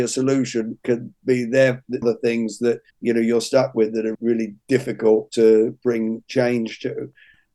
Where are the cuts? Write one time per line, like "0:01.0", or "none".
0:02.0
0:02.9
0:04.1